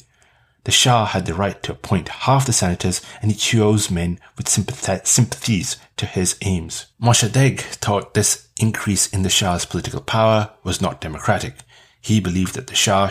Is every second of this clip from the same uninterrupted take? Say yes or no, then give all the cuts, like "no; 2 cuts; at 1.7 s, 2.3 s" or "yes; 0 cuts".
no; 1 cut; at 6.9 s